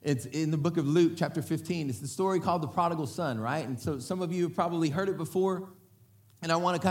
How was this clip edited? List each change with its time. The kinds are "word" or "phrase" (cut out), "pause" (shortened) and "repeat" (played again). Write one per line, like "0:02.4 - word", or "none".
none